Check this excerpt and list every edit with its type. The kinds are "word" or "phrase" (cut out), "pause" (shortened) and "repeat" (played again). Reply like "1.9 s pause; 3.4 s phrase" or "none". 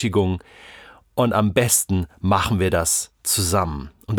3.1 s pause